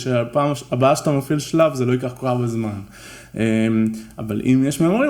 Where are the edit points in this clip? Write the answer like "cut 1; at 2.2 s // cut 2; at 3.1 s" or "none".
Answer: none